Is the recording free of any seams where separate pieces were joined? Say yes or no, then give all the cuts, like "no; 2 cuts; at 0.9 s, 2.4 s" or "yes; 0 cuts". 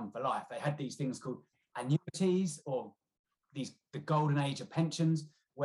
yes; 0 cuts